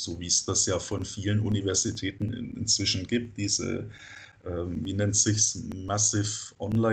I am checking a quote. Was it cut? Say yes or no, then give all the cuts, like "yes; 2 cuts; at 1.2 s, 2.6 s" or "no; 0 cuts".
no; 0 cuts